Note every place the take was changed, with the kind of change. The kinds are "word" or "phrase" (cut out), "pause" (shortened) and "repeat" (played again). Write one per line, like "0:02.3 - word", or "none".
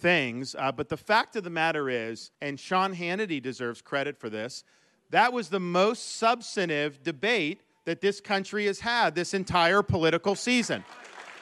0:02.3 - pause